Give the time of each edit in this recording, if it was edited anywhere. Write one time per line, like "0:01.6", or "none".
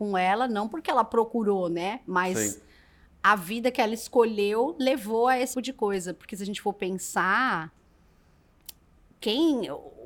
0:05.5